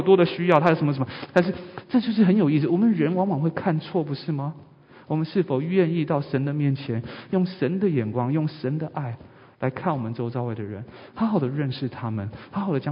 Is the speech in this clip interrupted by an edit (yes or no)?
no